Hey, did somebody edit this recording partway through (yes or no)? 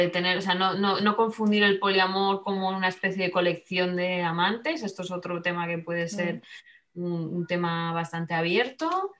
no